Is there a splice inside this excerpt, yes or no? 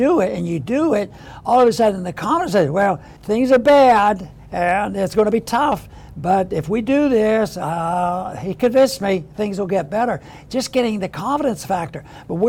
yes